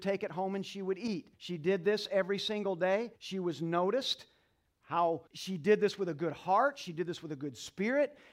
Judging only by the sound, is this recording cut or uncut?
cut